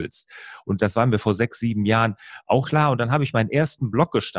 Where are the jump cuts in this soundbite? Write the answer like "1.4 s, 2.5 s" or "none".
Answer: 2.6 s